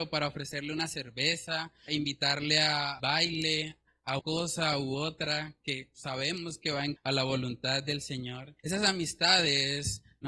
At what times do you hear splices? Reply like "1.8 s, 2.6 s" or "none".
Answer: 1.9 s, 3.0 s, 4.2 s, 7.0 s, 8.6 s